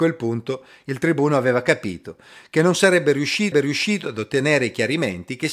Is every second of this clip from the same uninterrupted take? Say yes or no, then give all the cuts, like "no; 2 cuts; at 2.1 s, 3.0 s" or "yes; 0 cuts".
no; 1 cut; at 3.5 s